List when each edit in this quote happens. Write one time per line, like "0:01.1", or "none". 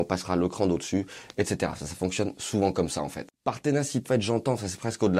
0:04.0